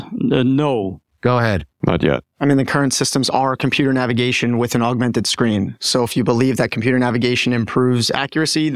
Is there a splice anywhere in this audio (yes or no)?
yes